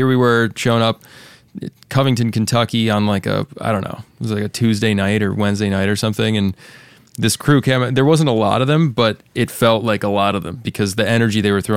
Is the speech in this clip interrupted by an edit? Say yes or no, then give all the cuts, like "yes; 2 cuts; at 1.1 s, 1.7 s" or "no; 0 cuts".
no; 0 cuts